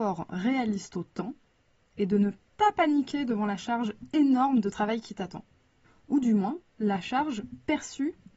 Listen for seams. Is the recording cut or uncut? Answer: uncut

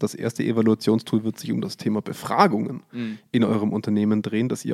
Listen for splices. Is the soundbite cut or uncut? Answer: uncut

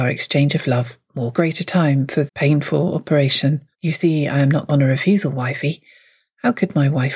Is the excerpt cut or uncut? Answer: cut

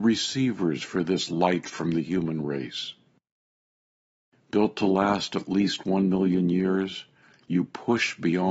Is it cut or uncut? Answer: uncut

